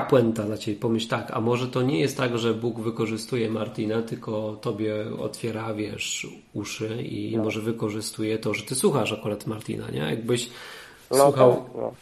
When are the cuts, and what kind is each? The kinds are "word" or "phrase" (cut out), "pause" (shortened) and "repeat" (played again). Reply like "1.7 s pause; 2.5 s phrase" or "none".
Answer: none